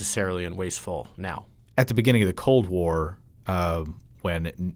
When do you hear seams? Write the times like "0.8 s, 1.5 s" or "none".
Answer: none

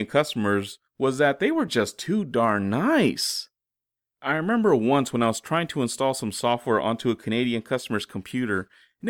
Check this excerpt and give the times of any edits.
none

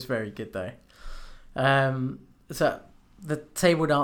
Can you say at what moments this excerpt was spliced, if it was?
none

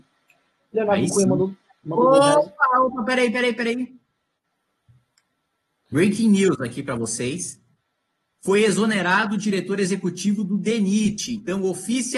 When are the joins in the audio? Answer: none

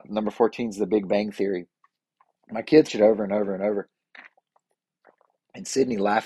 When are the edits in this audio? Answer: 2.9 s

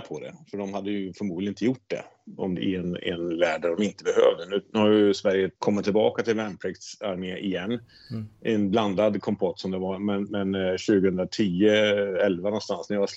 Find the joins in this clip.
2.6 s, 5.6 s

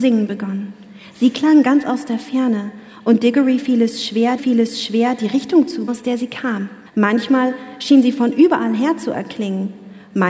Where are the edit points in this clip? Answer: 4.4 s, 5.9 s, 6.9 s

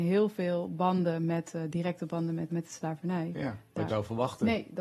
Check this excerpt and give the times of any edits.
2.5 s, 3.9 s

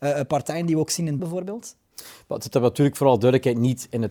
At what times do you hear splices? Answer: 1.2 s

